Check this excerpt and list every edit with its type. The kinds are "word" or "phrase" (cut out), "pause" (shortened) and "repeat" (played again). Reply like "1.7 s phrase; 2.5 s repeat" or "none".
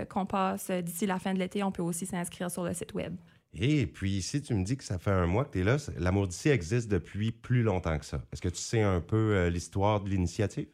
none